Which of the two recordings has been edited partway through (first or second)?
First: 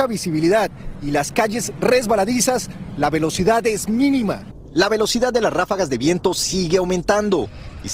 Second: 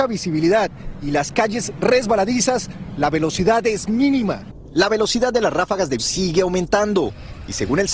second